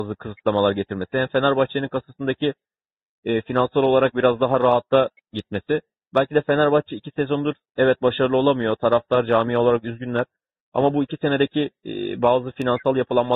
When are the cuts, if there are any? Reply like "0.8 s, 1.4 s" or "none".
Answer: none

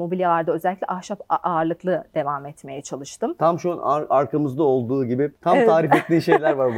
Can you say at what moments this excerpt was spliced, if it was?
5.4 s

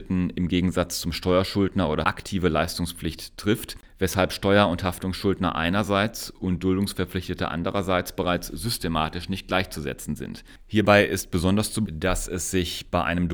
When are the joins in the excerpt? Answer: 2.0 s, 11.9 s

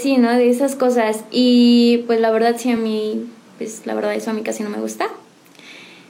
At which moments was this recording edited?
none

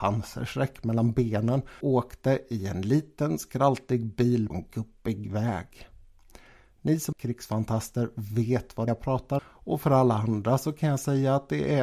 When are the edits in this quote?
1.8 s, 4.5 s, 7.1 s, 8.9 s, 9.4 s

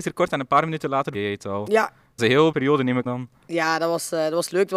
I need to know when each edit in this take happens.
1.1 s, 2.2 s, 2.5 s, 3.1 s

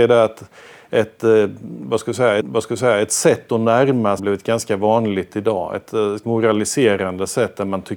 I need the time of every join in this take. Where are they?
2.4 s, 4.2 s, 6.2 s

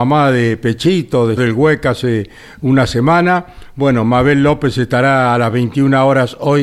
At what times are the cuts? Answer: 1.4 s

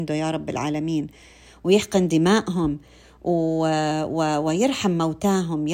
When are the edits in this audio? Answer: none

